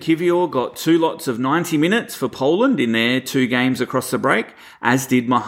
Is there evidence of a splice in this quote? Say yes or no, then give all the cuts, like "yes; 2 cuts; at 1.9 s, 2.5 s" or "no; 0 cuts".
no; 0 cuts